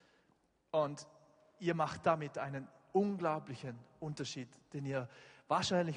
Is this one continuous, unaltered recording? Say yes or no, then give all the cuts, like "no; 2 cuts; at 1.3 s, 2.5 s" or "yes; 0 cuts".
yes; 0 cuts